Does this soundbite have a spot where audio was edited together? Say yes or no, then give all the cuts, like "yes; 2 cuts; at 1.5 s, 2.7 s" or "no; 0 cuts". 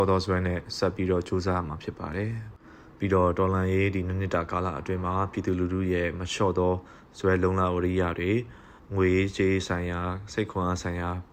yes; 1 cut; at 8.8 s